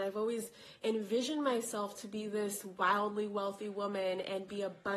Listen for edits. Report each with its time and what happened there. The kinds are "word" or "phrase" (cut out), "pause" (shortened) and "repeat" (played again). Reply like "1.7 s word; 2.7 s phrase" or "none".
none